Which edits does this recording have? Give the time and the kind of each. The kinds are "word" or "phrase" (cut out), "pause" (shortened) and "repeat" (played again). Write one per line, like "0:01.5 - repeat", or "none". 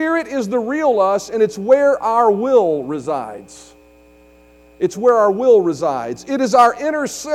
none